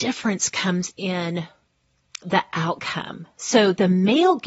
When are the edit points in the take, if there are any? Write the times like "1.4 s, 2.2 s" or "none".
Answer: 2.2 s